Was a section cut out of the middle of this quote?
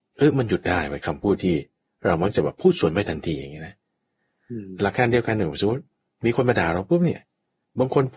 no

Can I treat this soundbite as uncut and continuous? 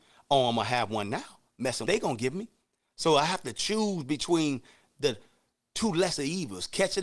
no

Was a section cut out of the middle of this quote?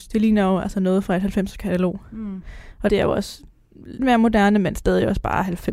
yes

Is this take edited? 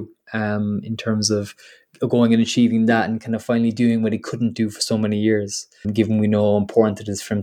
yes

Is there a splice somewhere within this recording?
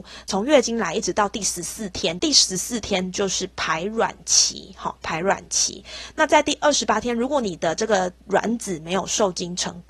no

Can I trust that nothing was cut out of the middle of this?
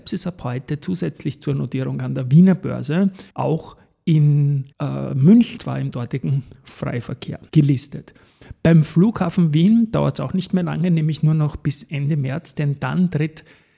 no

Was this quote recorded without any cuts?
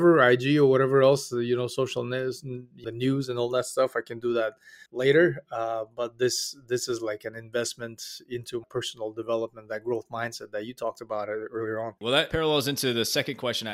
no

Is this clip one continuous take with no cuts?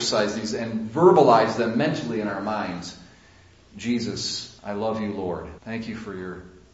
no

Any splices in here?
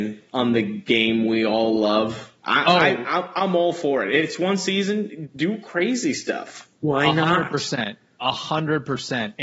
yes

